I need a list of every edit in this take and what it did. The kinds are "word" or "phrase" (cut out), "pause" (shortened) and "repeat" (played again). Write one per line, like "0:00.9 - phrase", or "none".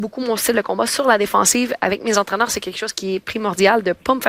none